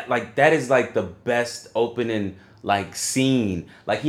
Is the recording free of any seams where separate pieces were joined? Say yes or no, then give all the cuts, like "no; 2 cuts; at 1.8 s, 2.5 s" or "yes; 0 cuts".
yes; 0 cuts